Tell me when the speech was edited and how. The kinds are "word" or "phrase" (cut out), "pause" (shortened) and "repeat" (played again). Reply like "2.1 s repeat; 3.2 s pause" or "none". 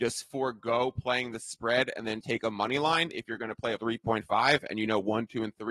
2.2 s word; 3.8 s word